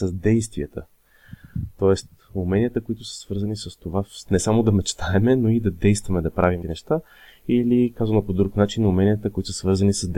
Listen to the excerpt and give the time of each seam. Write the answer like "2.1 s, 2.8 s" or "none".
6.6 s